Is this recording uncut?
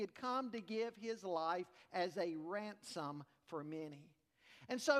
yes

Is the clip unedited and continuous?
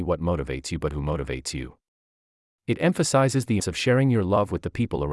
no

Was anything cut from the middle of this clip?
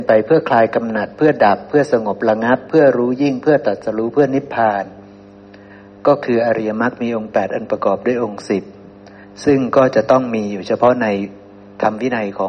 no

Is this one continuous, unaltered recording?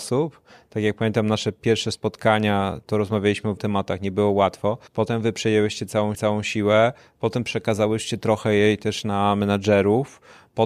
no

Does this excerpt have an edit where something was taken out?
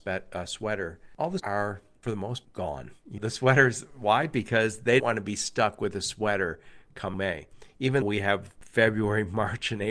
yes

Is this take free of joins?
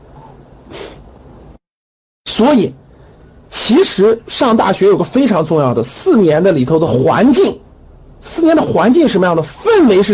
yes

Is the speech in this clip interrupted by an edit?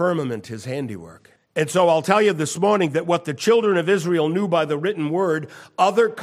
yes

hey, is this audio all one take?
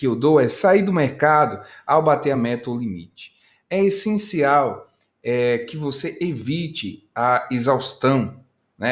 yes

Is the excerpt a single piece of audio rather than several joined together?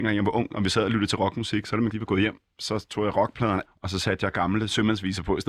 no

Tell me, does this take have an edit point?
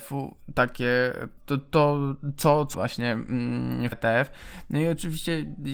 yes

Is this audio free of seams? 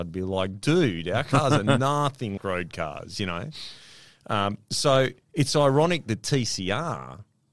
no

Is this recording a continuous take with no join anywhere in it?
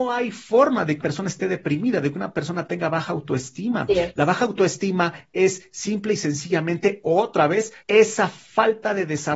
no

